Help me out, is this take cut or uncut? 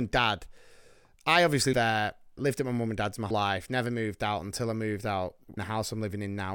cut